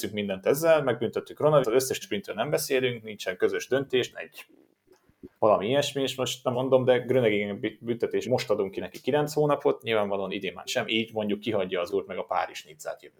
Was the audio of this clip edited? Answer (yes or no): yes